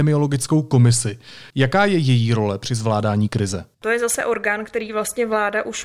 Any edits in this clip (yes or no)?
yes